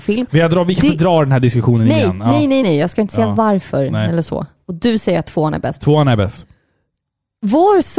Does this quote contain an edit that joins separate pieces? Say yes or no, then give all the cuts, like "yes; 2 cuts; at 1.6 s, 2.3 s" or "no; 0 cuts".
yes; 1 cut; at 2.6 s